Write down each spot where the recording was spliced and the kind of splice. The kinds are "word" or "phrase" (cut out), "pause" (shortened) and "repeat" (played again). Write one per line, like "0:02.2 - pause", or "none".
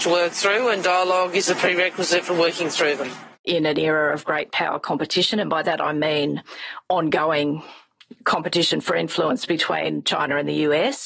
0:03.3 - pause

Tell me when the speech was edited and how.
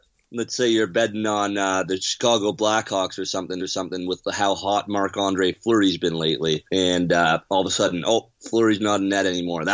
0:03.6 - repeat
0:06.7 - pause

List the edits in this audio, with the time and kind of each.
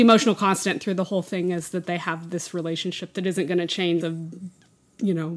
0:04.0 - word

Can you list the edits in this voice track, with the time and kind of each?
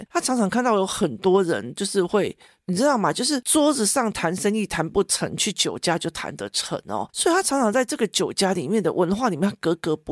none

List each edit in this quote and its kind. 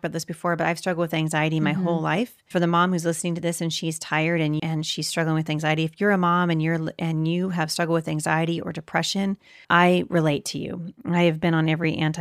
0:02.5 - word
0:04.6 - word
0:09.6 - word

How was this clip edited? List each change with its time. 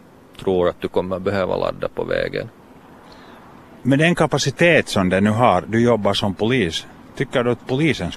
0:03.8 - pause

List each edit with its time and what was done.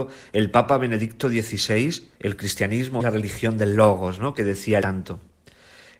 0:02.1 - pause
0:03.0 - word
0:04.8 - word

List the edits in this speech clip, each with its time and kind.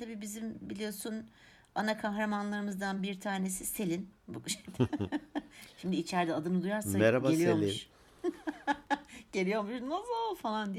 none

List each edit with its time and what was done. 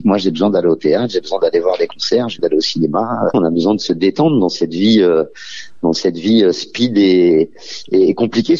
0:02.4 - word
0:03.3 - word

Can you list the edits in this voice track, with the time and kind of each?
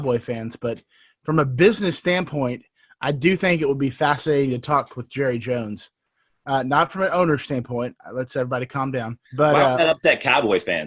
0:09.3 - pause

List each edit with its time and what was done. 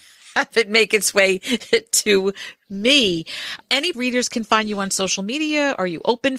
0:03.9 - word

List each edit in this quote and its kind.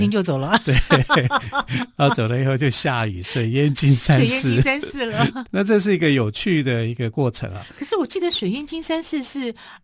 0:05.5 - word

